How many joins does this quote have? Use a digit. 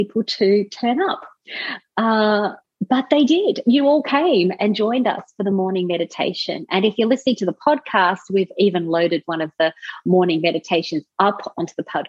0